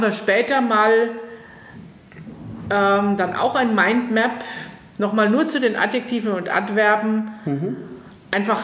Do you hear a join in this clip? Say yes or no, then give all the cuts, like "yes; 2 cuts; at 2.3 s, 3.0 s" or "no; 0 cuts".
no; 0 cuts